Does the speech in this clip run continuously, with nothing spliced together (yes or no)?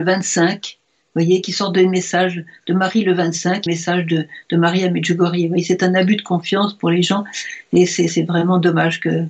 no